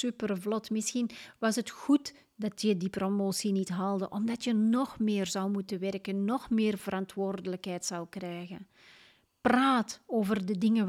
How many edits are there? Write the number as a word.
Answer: zero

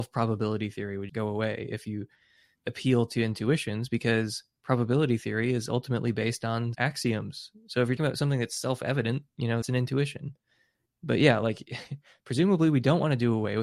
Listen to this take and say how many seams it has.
six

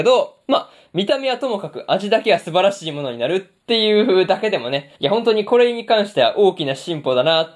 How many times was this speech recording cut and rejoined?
one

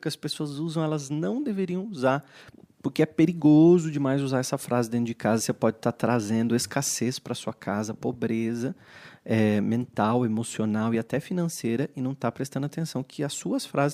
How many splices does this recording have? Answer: zero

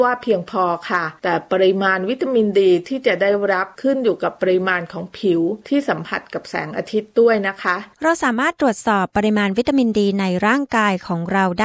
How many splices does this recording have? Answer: one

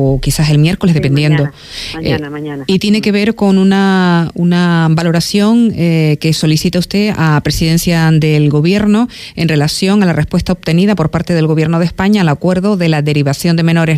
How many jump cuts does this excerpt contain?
zero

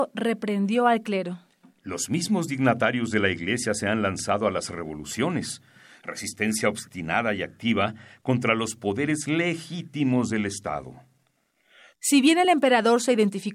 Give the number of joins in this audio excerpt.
zero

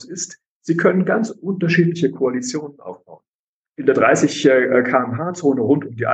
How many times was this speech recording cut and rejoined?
zero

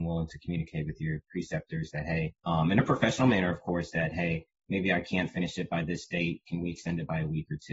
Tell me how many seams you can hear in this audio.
one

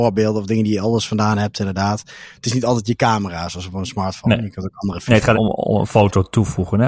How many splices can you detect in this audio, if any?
one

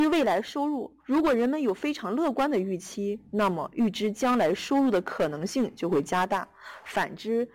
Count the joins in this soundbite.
one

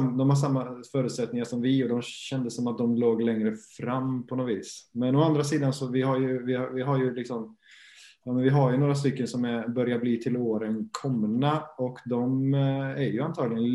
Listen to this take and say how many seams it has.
zero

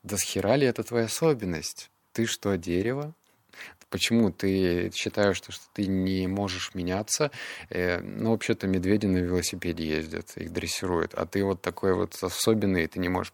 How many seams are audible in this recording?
zero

